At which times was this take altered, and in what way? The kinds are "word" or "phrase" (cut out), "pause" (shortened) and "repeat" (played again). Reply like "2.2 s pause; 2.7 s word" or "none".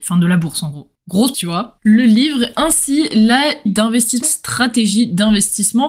1.3 s word; 2.5 s word; 3.7 s word; 4.2 s word